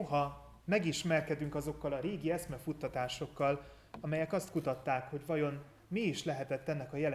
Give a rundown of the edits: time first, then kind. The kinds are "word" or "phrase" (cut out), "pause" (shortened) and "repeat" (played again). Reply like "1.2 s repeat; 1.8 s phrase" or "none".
none